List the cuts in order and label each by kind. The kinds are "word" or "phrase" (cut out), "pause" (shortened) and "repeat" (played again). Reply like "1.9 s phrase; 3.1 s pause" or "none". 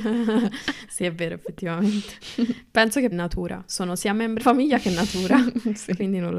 3.1 s phrase; 4.4 s word